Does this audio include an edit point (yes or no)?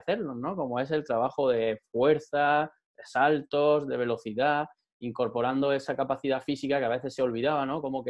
no